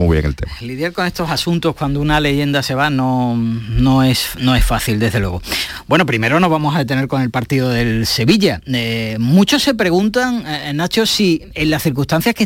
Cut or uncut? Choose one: uncut